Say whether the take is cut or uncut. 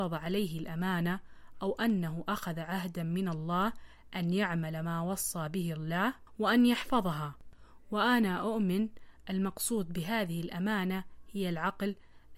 uncut